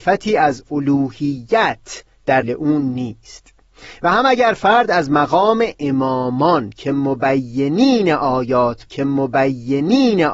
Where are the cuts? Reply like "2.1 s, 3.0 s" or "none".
2.4 s, 8.9 s